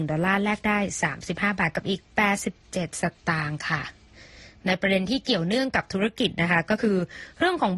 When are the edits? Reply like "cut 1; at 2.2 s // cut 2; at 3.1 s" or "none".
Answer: none